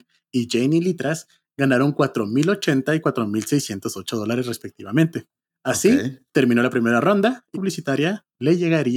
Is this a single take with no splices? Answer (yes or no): no